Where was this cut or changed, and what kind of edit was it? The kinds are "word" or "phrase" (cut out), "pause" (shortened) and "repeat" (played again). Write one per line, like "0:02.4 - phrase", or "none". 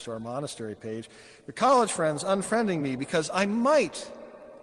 none